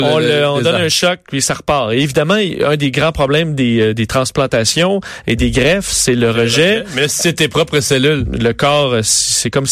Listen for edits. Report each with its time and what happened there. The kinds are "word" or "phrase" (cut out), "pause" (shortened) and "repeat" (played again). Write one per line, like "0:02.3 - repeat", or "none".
none